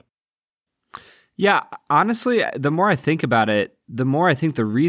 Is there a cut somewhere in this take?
no; 0 cuts

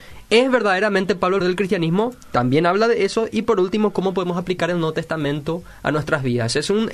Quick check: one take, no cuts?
no; 1 cut; at 1.4 s

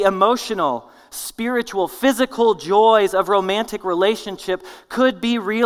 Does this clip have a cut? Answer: no; 0 cuts

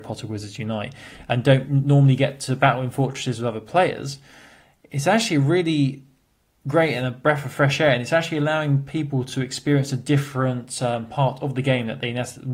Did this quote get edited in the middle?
no; 0 cuts

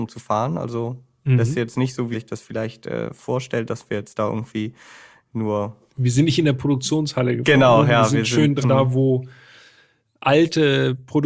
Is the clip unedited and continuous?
no; 2 cuts; at 2.1 s, 8.6 s

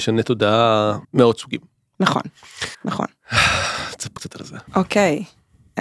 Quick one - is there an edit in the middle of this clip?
yes; 4 cuts; at 1.0 s, 2.7 s, 4.2 s, 4.7 s

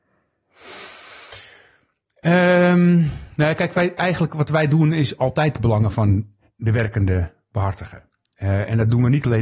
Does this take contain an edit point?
no; 0 cuts

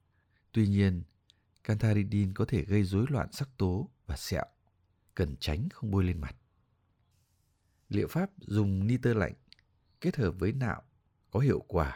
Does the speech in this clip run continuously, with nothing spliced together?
yes; 0 cuts

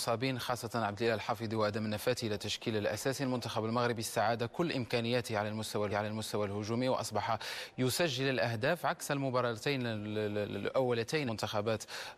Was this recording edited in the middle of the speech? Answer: yes; 2 cuts; at 5.9 s, 11.3 s

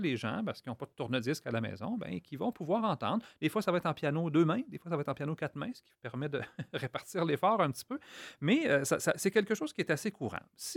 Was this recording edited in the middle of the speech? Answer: no; 0 cuts

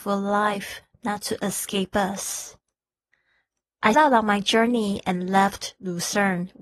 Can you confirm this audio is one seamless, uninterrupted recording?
no; 1 cut; at 3.9 s

